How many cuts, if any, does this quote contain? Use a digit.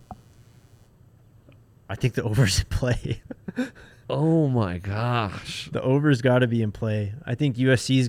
0